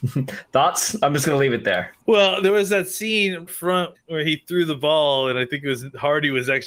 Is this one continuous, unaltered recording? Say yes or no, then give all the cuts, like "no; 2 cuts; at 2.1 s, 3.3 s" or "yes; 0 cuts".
no; 3 cuts; at 2.0 s, 3.5 s, 3.9 s